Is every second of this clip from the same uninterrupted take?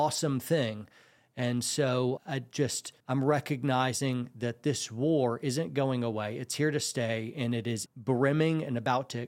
no; 3 cuts; at 2.2 s, 3.0 s, 7.9 s

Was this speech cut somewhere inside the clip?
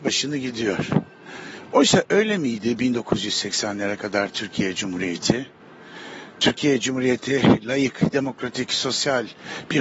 no; 0 cuts

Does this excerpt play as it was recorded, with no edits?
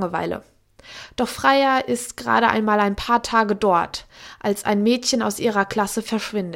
yes; 0 cuts

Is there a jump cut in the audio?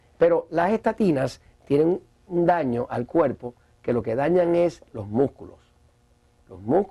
no; 0 cuts

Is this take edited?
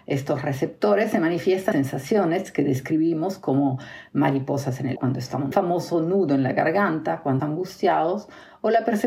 yes; 4 cuts; at 1.7 s, 5.0 s, 5.5 s, 7.4 s

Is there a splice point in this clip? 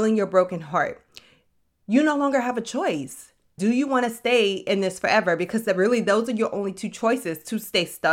yes; 1 cut; at 3.6 s

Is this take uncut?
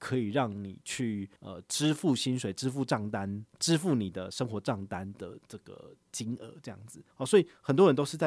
no; 3 cuts; at 1.4 s, 3.5 s, 7.1 s

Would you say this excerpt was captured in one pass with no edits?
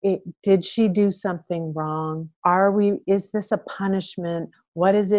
no; 1 cut; at 2.4 s

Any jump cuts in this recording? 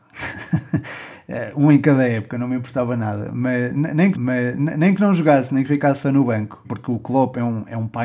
yes; 2 cuts; at 4.1 s, 6.6 s

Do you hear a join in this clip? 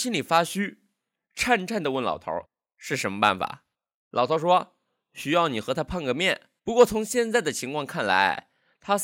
yes; 3 cuts; at 2.4 s, 3.7 s, 6.6 s

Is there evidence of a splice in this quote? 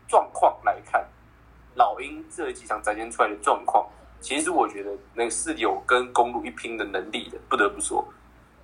yes; 1 cut; at 4.0 s

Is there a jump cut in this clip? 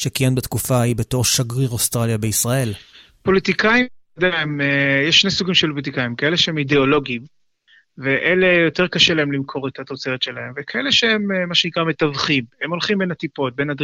no; 0 cuts

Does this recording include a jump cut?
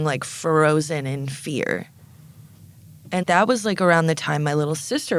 yes; 1 cut; at 3.2 s

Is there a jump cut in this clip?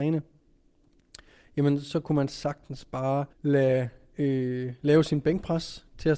yes; 1 cut; at 3.3 s

